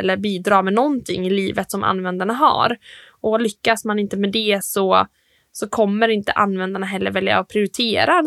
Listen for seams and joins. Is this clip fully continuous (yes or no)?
yes